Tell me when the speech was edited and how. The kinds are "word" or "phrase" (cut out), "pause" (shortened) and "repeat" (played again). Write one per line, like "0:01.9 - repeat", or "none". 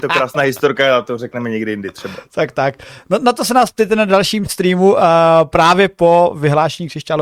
none